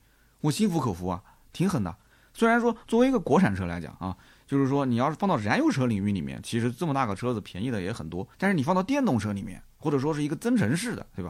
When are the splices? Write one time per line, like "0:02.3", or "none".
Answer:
0:08.3